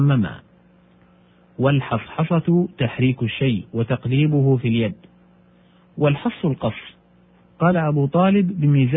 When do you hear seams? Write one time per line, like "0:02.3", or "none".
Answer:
none